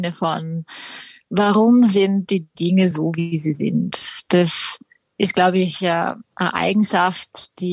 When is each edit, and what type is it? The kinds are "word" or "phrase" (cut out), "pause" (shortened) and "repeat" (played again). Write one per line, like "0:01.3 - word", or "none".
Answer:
none